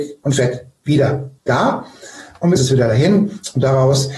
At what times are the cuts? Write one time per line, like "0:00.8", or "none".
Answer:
0:01.4
0:02.6